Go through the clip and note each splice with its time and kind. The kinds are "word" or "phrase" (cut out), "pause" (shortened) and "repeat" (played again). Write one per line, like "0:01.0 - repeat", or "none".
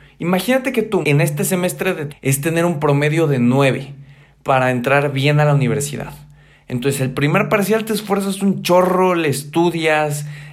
0:01.0 - word
0:02.1 - word